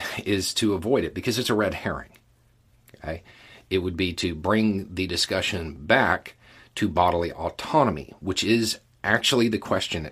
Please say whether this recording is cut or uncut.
uncut